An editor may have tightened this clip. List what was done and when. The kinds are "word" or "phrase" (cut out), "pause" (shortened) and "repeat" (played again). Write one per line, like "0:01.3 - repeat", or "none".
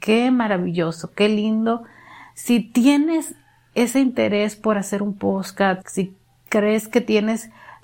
0:05.8 - word